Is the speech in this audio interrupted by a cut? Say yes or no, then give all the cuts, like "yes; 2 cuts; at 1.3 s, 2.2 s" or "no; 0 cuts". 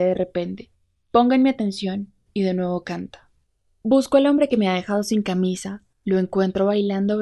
yes; 1 cut; at 3.5 s